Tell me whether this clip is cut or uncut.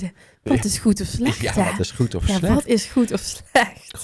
uncut